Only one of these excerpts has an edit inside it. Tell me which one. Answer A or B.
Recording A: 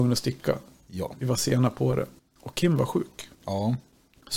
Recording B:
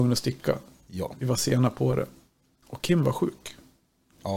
A